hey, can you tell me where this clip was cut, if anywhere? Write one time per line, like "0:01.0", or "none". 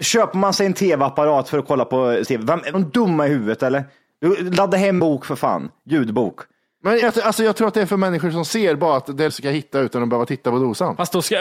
0:02.2
0:02.7
0:05.0
0:07.0
0:07.9
0:09.3

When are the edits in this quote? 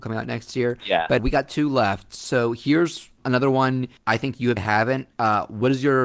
0:01.2
0:04.0
0:04.6

